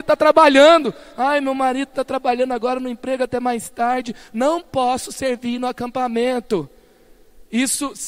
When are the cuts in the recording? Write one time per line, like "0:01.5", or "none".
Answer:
none